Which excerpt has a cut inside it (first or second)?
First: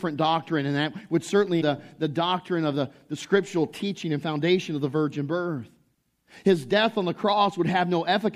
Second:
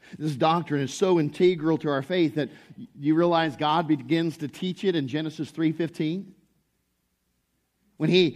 first